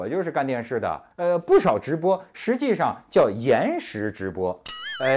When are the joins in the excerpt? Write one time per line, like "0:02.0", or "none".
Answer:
0:01.1